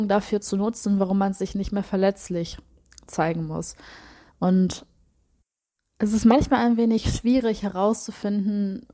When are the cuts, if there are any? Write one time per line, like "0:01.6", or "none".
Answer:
none